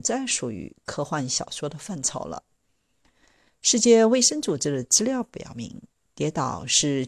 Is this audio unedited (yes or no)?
yes